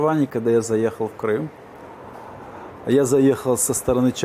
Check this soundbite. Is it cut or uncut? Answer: uncut